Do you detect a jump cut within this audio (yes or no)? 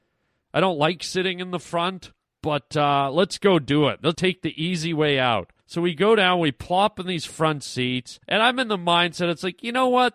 yes